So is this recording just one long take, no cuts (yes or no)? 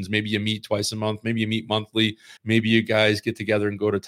no